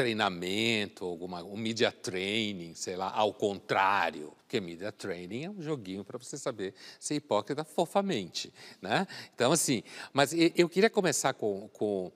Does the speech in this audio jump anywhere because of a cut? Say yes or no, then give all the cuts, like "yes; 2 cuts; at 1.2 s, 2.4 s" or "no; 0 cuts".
yes; 1 cut; at 4.4 s